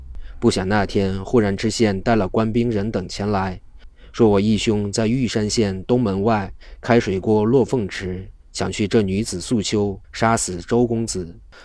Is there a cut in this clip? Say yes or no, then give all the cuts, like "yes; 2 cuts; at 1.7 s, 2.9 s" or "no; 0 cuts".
yes; 1 cut; at 10.0 s